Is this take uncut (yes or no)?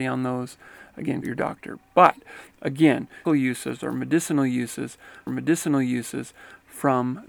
no